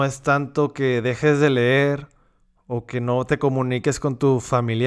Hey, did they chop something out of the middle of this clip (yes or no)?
no